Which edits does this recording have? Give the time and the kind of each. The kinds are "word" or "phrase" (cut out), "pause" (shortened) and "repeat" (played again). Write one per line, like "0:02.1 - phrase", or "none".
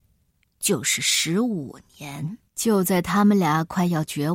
0:02.5 - pause